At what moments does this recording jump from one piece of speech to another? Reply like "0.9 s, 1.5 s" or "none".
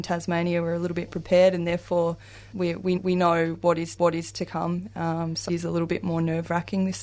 1.1 s, 2.5 s, 3.0 s, 4.0 s, 5.5 s